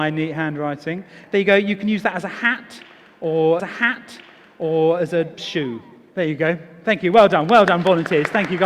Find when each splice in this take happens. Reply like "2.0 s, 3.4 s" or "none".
3.6 s